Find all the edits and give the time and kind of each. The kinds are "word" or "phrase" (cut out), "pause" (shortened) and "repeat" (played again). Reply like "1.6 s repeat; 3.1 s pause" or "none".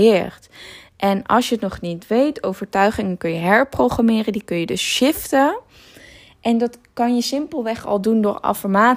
none